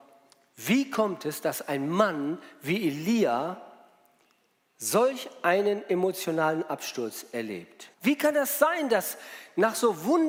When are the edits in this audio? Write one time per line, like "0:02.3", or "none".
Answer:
0:07.9